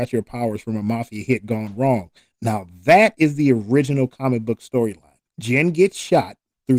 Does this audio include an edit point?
yes; 1 cut; at 5.3 s

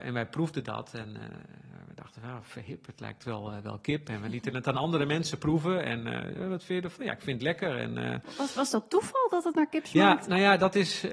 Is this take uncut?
yes; 0 cuts

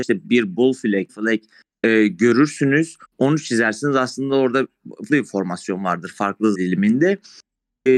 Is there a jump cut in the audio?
yes; 4 cuts; at 1.1 s, 3.0 s, 5.1 s, 6.5 s

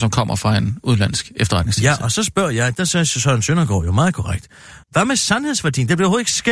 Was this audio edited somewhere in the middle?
yes; 1 cut; at 4.8 s

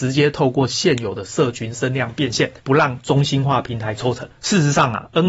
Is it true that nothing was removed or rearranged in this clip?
no; 1 cut; at 2.6 s

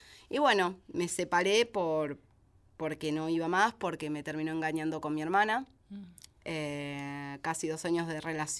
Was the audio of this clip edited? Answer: no; 0 cuts

